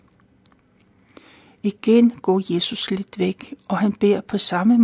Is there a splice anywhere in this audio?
no; 0 cuts

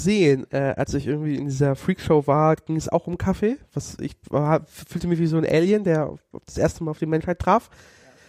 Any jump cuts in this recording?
no; 0 cuts

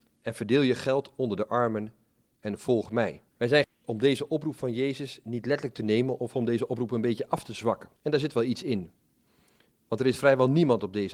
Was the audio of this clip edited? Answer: yes; 3 cuts; at 3.3 s, 3.6 s, 8.0 s

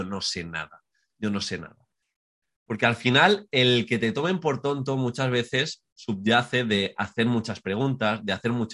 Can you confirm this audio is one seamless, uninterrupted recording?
yes; 0 cuts

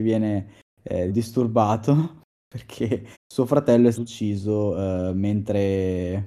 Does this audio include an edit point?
yes; 3 cuts; at 1.1 s, 3.1 s, 3.9 s

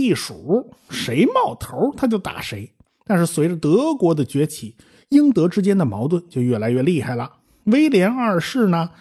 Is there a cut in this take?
no; 0 cuts

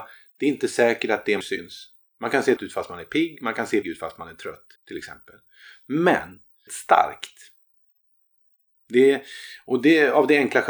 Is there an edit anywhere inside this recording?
yes; 5 cuts; at 1.4 s, 2.6 s, 3.8 s, 4.8 s, 6.7 s

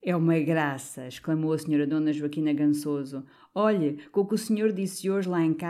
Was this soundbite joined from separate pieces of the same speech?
no; 0 cuts

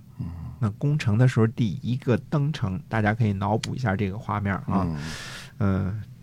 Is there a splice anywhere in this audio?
no; 0 cuts

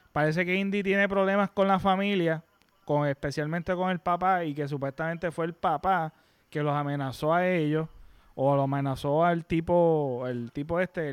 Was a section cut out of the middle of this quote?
no; 0 cuts

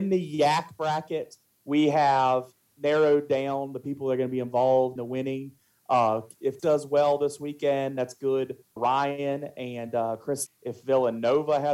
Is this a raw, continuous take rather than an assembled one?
no; 5 cuts; at 2.7 s, 5.0 s, 6.6 s, 8.8 s, 10.5 s

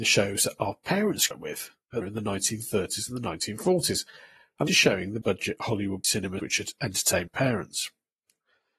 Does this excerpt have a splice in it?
yes; 7 cuts; at 1.3 s, 2.0 s, 4.7 s, 5.2 s, 6.0 s, 6.4 s, 7.3 s

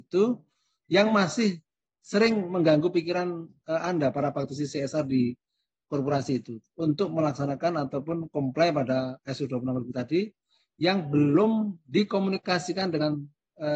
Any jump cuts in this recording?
no; 0 cuts

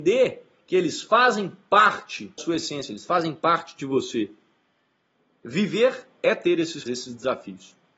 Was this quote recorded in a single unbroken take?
no; 2 cuts; at 2.4 s, 6.9 s

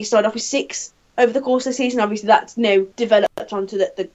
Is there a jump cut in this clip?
yes; 1 cut; at 2.9 s

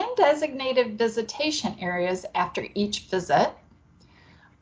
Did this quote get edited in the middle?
no; 0 cuts

